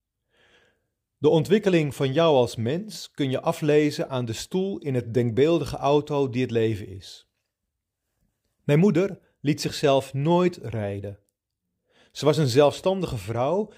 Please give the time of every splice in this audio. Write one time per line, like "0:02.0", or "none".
none